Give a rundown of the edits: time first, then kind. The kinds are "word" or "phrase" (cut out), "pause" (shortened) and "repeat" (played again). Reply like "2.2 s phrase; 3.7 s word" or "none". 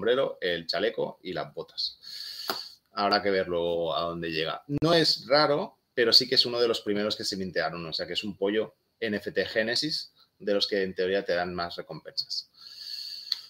none